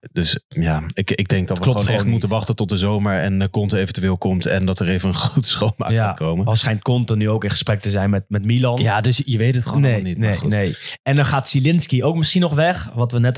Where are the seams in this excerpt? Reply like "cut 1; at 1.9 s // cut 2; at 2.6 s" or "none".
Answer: none